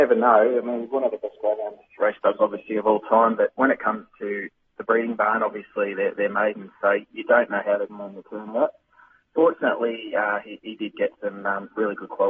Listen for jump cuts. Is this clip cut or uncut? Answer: uncut